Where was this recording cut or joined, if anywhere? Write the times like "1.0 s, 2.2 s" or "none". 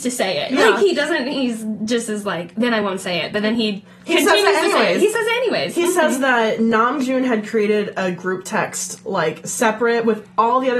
none